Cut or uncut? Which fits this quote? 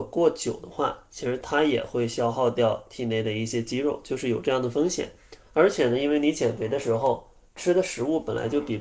cut